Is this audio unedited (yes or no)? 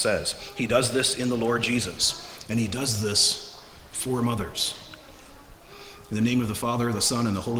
yes